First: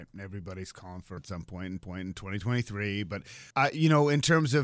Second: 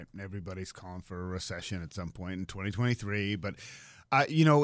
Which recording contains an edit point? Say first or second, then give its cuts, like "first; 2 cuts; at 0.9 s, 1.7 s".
first; 3 cuts; at 1.2 s, 1.8 s, 3.5 s